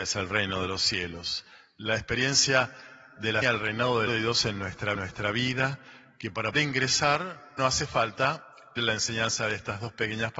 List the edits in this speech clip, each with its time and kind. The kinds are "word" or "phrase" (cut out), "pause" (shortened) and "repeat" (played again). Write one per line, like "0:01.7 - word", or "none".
0:03.4 - word
0:04.1 - word
0:04.9 - repeat
0:06.5 - word
0:07.6 - word
0:08.8 - word